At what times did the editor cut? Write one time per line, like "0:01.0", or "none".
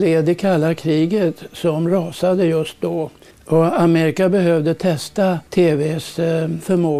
0:03.3
0:05.5